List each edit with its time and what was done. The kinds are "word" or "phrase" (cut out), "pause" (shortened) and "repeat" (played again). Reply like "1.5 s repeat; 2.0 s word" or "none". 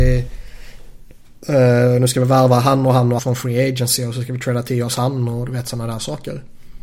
3.2 s word